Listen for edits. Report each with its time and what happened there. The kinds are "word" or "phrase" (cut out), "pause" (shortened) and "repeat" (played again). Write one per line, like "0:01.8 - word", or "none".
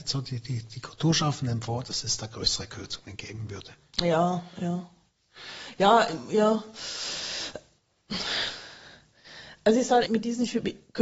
0:10.1 - word